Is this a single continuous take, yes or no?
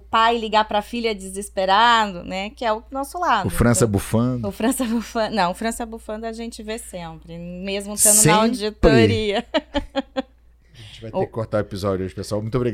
yes